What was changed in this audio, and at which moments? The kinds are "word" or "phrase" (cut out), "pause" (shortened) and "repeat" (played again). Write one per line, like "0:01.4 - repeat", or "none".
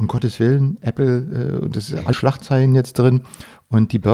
0:02.1 - word

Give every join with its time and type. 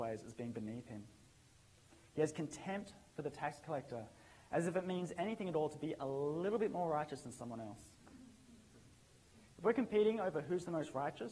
none

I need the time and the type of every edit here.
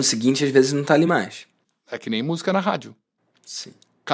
none

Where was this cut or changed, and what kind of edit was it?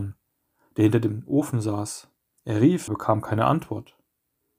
0:02.3 - pause
0:02.9 - phrase

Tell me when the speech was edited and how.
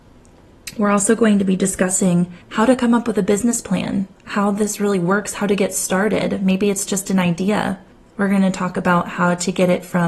0:02.4 - pause
0:04.1 - pause
0:07.9 - pause

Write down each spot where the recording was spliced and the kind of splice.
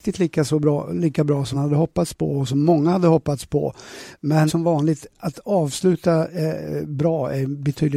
0:01.5 - word
0:04.5 - phrase

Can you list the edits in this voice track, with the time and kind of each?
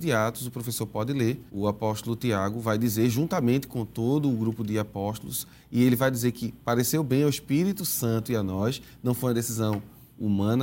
0:01.5 - pause

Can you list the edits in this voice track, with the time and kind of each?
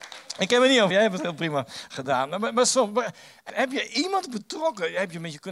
0:00.9 - word
0:03.5 - phrase

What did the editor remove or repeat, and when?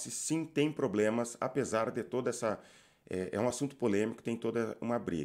none

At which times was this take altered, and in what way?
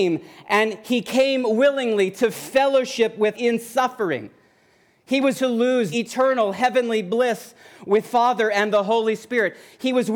0:03.3 - word
0:05.3 - word
0:05.9 - word
0:08.0 - word

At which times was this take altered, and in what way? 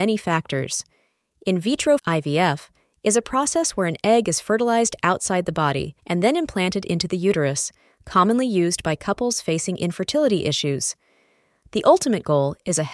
0:02.0 - word
0:06.0 - pause

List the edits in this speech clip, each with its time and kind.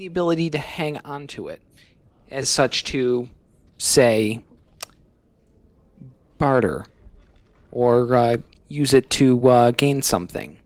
none

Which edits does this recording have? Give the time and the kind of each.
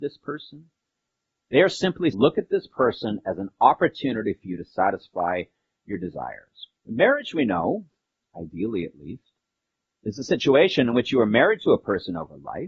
0:02.1 - word
0:06.8 - pause

